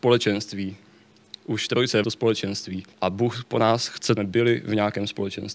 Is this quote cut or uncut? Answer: cut